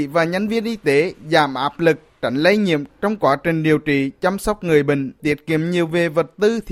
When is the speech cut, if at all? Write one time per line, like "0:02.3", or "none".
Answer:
none